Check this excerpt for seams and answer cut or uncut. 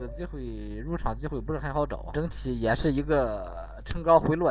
cut